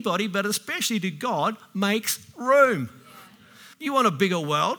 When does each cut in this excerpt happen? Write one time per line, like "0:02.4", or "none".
0:03.7